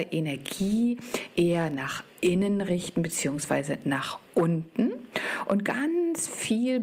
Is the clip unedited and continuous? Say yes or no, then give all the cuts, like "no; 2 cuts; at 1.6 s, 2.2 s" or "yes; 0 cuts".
no; 1 cut; at 2.1 s